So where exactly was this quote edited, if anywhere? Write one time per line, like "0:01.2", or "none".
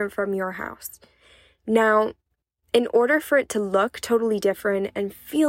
none